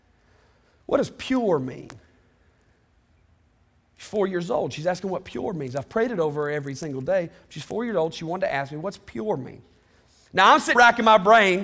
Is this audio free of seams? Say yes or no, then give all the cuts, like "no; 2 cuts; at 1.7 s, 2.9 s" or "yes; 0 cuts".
no; 1 cut; at 10.7 s